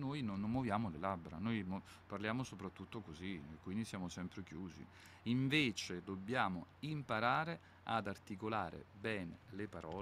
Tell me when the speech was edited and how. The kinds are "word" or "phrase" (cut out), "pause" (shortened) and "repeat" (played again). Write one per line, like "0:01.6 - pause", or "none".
none